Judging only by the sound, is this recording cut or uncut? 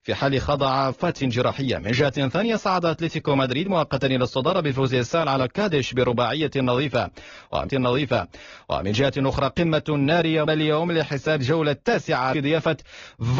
cut